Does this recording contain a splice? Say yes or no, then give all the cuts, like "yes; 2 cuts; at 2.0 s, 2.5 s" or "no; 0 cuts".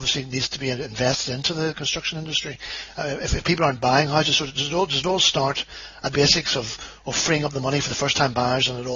yes; 1 cut; at 6.1 s